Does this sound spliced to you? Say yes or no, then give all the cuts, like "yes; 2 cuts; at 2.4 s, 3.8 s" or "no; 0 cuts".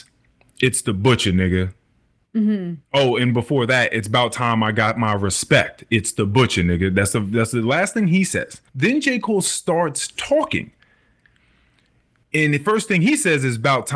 yes; 2 cuts; at 8.7 s, 10.2 s